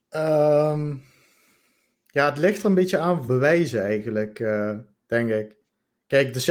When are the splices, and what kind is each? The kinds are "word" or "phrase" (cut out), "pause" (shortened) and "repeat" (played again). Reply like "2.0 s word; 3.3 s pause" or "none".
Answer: 3.3 s phrase